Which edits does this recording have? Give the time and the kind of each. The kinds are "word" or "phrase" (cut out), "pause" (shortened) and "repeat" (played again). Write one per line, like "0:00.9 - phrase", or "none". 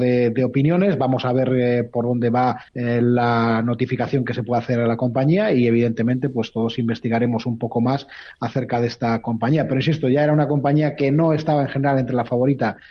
0:02.7 - pause